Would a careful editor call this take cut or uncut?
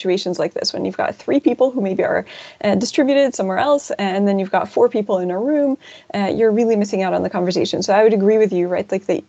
uncut